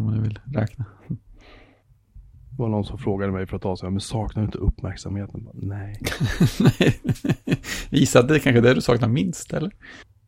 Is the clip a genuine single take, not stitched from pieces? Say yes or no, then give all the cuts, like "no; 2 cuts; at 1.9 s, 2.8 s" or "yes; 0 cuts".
yes; 0 cuts